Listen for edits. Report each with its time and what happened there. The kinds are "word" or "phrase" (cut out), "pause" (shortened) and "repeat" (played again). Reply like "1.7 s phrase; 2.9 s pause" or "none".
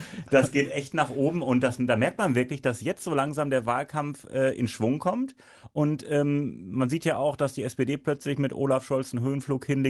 none